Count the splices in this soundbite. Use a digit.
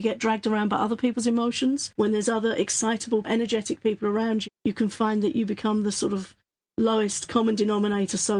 2